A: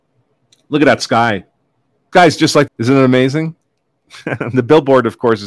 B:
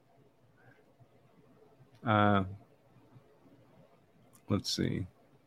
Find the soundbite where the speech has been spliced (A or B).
A